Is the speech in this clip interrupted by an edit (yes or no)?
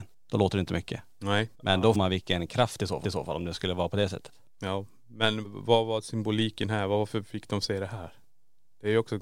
yes